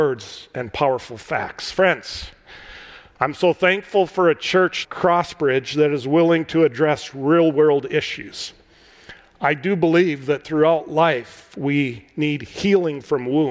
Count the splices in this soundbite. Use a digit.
1